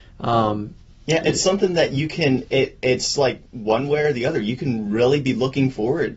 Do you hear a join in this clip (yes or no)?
no